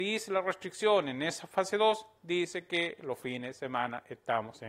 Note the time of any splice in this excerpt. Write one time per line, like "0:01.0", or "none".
none